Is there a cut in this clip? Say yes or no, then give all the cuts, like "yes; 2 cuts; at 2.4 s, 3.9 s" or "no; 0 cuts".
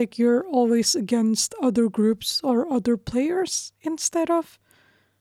no; 0 cuts